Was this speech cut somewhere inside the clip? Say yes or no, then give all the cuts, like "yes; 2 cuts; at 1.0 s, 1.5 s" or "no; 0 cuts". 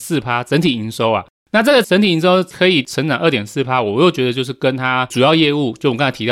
no; 0 cuts